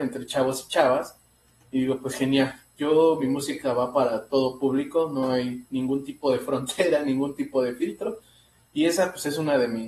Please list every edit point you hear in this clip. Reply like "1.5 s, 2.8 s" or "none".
none